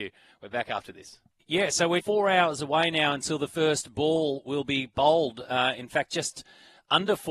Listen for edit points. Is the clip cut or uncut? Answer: cut